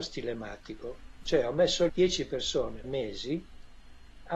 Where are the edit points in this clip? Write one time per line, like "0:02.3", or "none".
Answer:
0:01.9
0:02.8